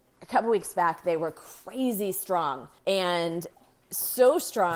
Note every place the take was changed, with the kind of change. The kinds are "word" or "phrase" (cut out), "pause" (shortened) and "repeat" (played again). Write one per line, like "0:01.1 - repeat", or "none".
0:02.8 - pause